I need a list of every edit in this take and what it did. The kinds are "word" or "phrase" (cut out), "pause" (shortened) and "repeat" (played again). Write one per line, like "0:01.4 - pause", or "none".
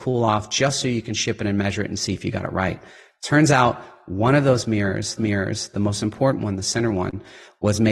0:05.2 - repeat